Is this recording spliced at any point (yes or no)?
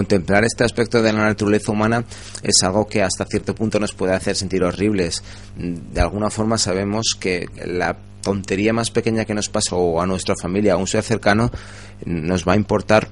yes